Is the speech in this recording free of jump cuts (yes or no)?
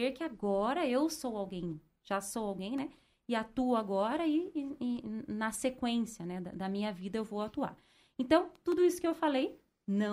yes